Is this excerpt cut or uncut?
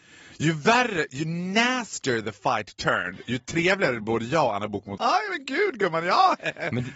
cut